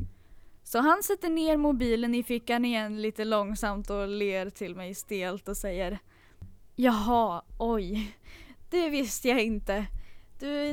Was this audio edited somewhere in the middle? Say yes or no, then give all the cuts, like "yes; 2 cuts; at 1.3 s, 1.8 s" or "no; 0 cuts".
no; 0 cuts